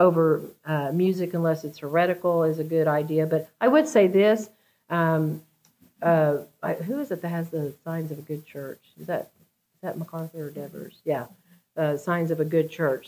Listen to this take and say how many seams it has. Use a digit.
0